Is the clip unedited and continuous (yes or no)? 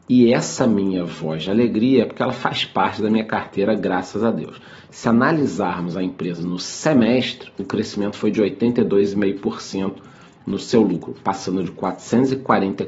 yes